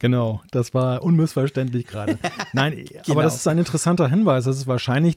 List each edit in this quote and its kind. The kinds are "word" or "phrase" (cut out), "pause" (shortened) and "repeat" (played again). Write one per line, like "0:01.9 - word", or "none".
none